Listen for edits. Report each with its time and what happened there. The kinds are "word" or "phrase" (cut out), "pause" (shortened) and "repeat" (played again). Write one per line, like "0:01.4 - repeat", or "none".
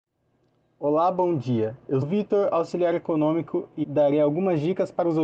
0:02.0 - word
0:03.8 - word